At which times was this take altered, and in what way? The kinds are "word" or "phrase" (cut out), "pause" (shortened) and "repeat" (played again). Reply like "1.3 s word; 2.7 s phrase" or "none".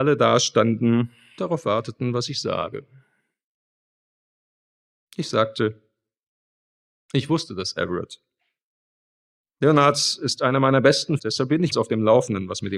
1.4 s word; 11.2 s word; 11.7 s word